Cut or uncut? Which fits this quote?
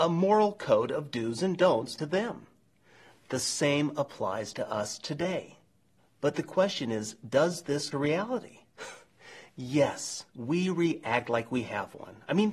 cut